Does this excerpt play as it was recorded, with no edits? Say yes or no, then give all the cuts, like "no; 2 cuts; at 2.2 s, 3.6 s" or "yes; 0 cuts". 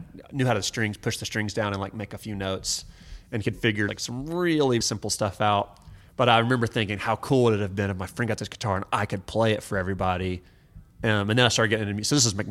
no; 2 cuts; at 3.9 s, 4.8 s